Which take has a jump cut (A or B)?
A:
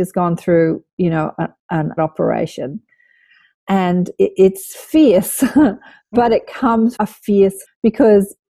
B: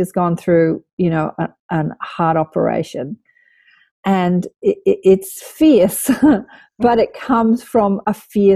A